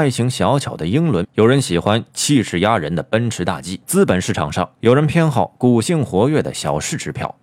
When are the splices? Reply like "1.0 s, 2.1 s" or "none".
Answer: 1.2 s, 3.8 s